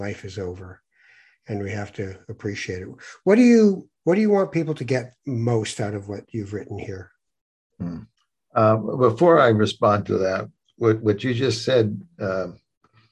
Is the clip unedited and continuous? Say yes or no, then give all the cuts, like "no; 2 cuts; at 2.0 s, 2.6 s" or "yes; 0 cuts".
no; 2 cuts; at 4.0 s, 8.1 s